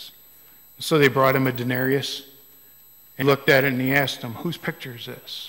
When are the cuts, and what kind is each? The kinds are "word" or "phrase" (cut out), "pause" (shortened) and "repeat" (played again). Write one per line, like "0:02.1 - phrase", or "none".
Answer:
0:03.2 - word